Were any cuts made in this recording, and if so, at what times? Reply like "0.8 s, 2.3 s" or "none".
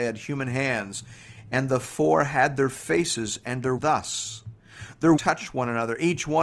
3.8 s, 5.2 s